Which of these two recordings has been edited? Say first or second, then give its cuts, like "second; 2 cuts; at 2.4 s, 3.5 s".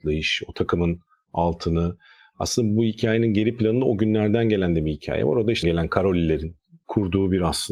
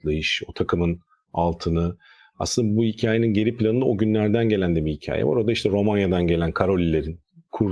first; 1 cut; at 5.6 s